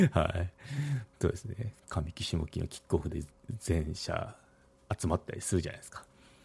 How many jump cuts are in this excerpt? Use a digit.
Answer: 1